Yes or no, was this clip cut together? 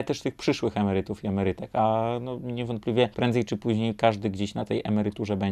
yes